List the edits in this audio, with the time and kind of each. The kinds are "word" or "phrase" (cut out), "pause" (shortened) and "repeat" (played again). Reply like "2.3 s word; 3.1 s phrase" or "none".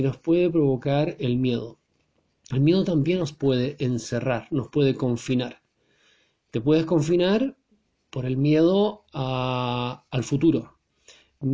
none

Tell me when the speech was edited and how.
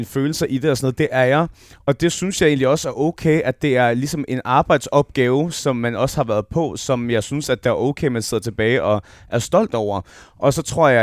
none

